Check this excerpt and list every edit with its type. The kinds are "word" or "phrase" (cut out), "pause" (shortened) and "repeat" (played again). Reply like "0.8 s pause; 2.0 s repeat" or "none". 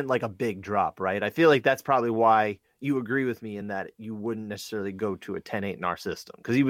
none